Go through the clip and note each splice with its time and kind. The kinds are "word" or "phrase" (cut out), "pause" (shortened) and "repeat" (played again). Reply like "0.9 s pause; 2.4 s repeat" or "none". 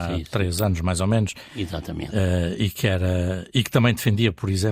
none